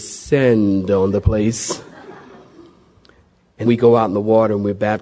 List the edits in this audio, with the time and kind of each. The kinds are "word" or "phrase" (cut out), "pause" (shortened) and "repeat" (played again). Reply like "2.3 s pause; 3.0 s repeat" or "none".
3.7 s word